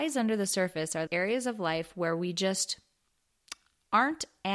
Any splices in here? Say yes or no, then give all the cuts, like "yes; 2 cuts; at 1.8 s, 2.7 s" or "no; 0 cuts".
yes; 1 cut; at 1.1 s